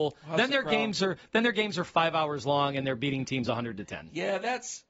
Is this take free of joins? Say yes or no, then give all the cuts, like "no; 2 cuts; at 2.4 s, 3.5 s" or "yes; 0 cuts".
yes; 0 cuts